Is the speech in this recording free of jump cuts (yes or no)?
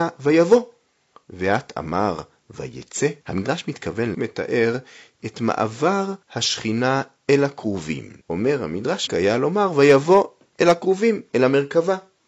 no